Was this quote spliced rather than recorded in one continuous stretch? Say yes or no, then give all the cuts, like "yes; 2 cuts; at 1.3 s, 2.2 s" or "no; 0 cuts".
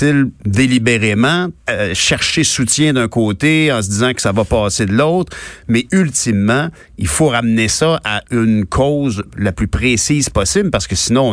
yes; 1 cut; at 1.6 s